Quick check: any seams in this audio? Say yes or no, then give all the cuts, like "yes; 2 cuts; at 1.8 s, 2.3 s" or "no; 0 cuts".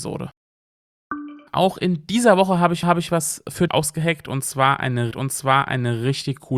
yes; 4 cuts; at 1.5 s, 2.8 s, 3.7 s, 5.1 s